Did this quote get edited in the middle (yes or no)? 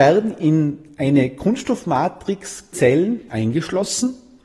yes